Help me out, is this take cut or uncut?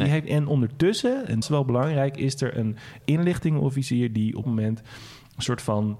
cut